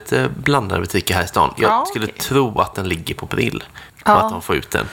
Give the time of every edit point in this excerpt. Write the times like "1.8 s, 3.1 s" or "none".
3.9 s